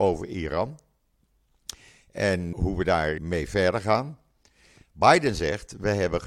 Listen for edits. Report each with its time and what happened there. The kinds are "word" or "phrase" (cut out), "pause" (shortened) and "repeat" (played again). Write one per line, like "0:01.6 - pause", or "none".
0:02.5 - word
0:03.2 - word